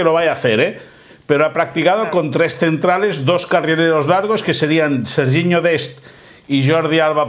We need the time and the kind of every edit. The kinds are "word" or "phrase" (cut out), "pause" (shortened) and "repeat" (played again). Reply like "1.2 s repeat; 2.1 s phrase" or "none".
none